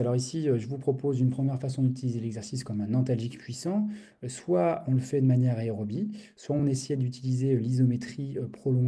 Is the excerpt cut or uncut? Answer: uncut